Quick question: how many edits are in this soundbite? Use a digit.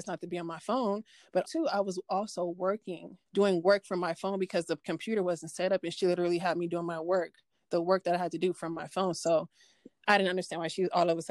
2